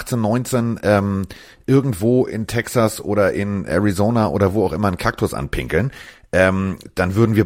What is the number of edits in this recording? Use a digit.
0